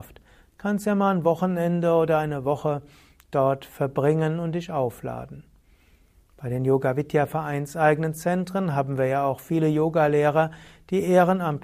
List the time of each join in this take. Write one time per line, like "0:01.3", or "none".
none